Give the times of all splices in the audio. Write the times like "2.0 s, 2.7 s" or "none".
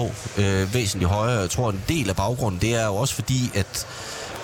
none